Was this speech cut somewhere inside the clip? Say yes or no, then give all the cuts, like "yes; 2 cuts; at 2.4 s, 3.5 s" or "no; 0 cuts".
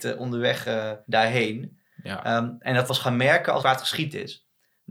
yes; 3 cuts; at 1.0 s, 2.9 s, 3.6 s